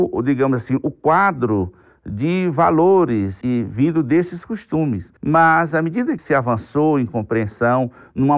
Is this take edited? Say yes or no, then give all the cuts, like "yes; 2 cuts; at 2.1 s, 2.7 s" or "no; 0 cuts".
yes; 3 cuts; at 3.4 s, 5.2 s, 6.2 s